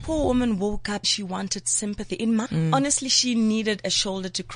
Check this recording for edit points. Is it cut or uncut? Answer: cut